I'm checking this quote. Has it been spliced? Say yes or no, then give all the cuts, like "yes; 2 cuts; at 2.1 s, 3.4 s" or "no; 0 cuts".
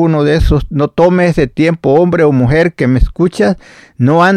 no; 0 cuts